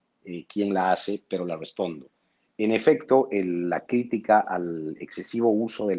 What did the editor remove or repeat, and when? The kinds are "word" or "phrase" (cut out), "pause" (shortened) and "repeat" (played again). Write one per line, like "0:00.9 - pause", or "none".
none